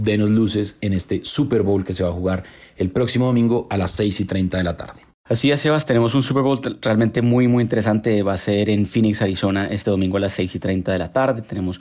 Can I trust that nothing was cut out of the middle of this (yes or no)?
yes